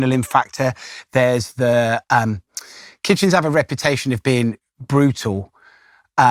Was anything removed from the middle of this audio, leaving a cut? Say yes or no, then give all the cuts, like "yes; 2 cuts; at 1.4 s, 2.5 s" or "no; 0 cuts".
no; 0 cuts